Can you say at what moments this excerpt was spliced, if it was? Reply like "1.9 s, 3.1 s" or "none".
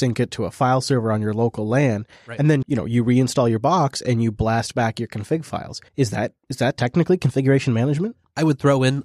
2.6 s, 5.9 s